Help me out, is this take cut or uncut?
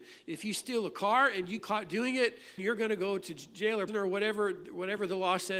cut